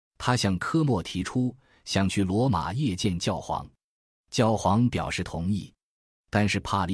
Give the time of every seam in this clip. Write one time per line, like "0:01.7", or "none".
none